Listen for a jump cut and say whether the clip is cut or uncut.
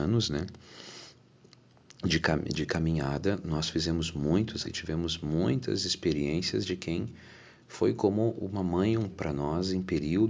cut